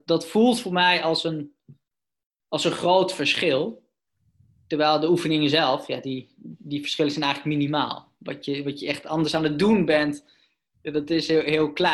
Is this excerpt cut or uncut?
uncut